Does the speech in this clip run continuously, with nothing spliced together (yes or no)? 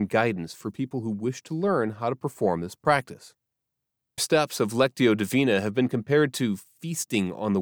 no